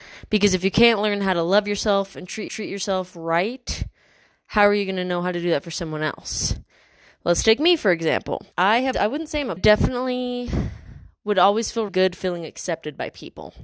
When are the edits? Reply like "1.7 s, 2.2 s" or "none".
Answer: 2.5 s, 8.5 s, 8.9 s, 9.6 s, 11.9 s